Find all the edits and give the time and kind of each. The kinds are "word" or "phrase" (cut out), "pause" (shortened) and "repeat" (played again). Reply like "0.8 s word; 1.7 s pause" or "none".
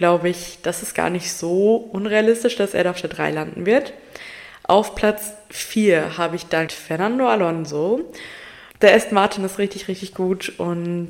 6.7 s word; 8.7 s pause